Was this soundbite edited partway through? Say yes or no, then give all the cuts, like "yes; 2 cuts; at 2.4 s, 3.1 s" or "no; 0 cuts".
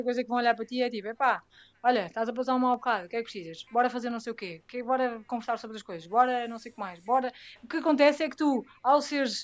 no; 0 cuts